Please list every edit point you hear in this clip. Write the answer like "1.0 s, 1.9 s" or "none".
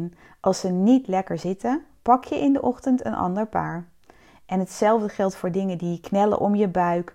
none